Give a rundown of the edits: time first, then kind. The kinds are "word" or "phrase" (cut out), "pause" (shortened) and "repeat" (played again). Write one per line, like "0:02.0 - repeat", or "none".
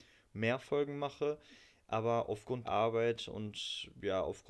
0:02.6 - word